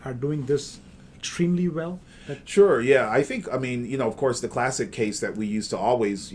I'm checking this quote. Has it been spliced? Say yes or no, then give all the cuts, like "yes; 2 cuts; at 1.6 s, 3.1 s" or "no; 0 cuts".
no; 0 cuts